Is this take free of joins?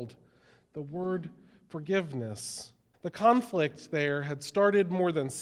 no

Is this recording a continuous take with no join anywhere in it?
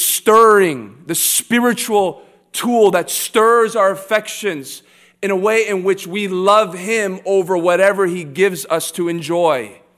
yes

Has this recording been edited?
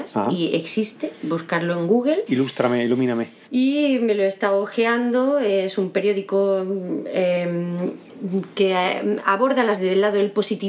yes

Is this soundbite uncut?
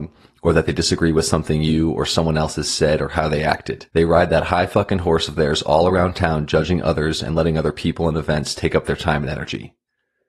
no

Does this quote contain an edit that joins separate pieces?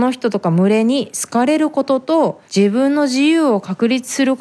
yes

